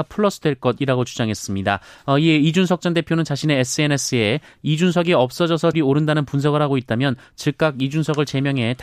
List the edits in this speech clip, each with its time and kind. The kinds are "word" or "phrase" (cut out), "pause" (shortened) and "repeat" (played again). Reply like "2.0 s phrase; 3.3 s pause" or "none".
5.7 s word